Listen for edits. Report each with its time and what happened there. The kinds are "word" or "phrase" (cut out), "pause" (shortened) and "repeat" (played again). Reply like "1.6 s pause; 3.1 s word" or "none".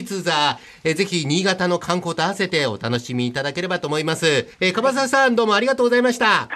4.5 s pause